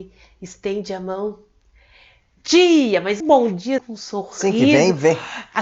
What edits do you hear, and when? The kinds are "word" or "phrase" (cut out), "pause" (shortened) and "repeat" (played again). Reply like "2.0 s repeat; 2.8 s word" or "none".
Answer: 2.4 s word; 3.2 s word; 3.8 s word